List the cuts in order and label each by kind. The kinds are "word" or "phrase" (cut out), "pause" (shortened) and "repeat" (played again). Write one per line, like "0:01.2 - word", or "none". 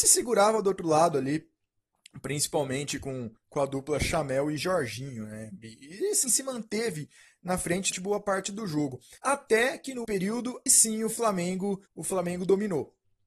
0:03.4 - pause
0:06.2 - word
0:07.9 - word
0:09.2 - pause
0:10.0 - word
0:10.7 - word
0:11.9 - pause